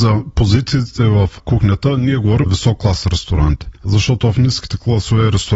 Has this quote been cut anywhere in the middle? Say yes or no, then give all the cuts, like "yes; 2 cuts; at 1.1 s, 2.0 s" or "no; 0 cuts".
yes; 2 cuts; at 2.4 s, 3.8 s